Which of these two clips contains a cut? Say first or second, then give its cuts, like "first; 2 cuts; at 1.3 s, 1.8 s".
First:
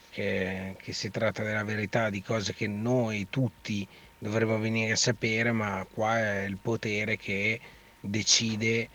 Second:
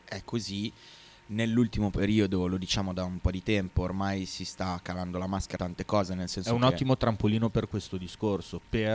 second; 1 cut; at 5.6 s